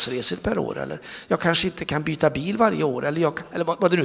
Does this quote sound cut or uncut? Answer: uncut